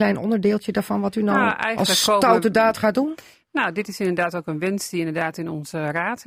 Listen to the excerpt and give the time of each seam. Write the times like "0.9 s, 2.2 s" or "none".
none